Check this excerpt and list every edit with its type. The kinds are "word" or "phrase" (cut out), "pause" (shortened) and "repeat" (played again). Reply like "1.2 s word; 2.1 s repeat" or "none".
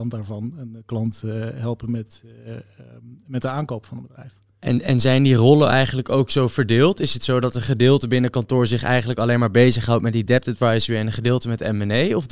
none